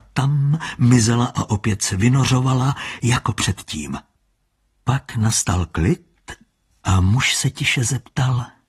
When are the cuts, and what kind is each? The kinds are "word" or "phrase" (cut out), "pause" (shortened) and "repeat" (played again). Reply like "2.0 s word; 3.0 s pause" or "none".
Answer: none